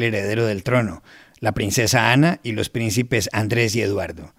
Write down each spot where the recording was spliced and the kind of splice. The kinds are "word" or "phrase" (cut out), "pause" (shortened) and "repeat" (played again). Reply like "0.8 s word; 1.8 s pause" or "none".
none